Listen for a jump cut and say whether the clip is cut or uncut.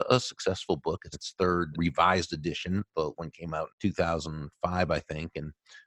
cut